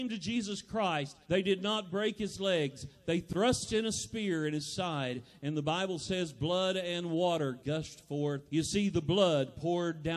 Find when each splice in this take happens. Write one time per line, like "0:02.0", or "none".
0:01.2
0:08.5